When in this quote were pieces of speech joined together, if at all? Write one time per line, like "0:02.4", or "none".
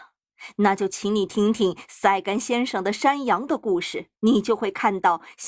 0:04.2